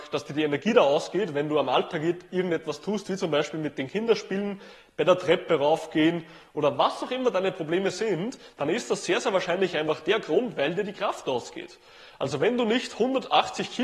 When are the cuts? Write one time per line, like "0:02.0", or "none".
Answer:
none